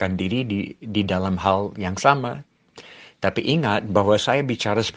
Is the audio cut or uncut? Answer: uncut